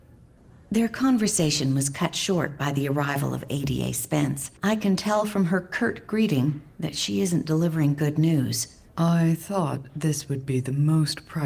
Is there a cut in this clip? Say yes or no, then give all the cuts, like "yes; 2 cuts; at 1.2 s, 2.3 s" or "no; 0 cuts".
yes; 2 cuts; at 4.6 s, 8.9 s